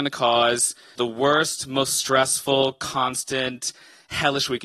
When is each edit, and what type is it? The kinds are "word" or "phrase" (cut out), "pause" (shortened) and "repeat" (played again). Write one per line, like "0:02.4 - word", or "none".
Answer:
0:00.9 - word